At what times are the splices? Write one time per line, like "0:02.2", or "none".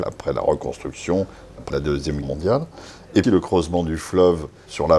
0:01.7
0:02.2
0:03.2